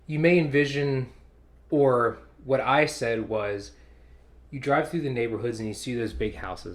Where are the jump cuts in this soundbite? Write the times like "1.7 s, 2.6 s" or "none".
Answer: none

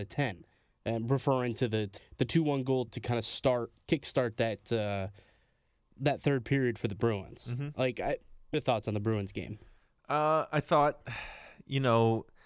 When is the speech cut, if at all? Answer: 2.0 s, 2.9 s, 5.9 s, 8.5 s

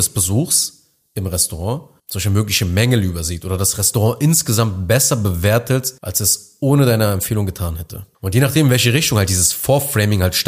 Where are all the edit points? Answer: 2.0 s, 6.0 s, 8.1 s

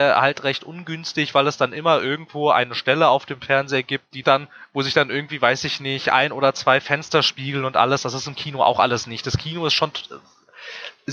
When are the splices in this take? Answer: 4.2 s

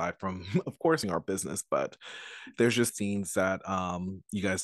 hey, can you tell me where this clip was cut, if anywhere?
1.0 s, 2.9 s

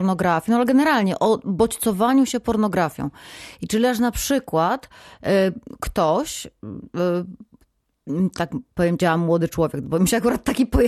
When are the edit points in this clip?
none

